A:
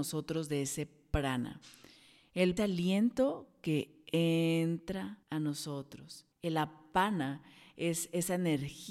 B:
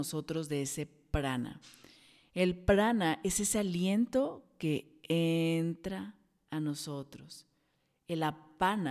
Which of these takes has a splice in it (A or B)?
A